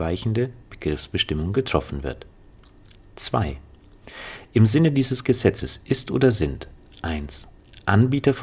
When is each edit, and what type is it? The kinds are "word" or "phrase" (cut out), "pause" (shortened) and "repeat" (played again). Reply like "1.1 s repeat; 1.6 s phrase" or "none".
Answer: none